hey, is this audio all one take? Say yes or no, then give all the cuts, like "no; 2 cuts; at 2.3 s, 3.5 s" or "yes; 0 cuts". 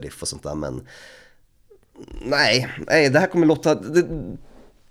yes; 0 cuts